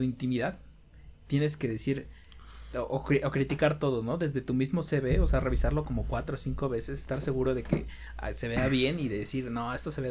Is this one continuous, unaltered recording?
yes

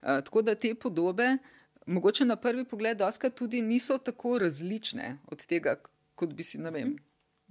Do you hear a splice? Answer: no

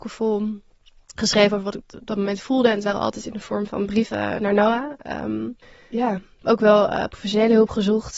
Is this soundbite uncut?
no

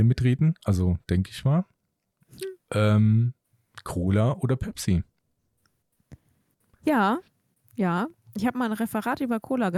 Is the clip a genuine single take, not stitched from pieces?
yes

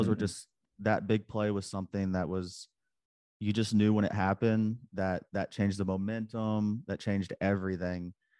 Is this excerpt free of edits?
yes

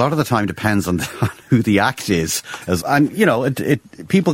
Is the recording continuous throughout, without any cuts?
no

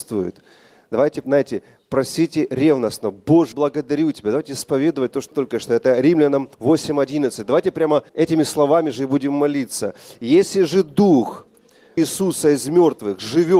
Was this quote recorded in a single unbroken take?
no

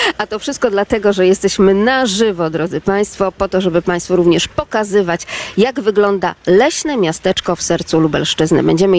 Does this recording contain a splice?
no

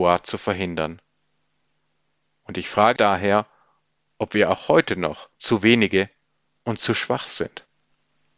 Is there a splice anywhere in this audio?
yes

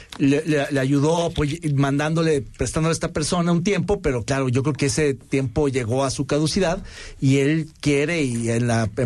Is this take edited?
no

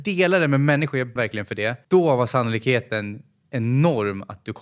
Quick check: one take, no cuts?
no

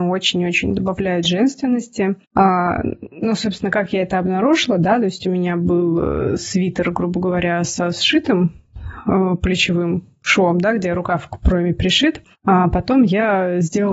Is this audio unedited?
no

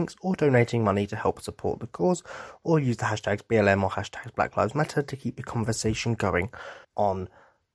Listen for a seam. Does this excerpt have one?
yes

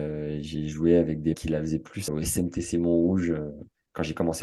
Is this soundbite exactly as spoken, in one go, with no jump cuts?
no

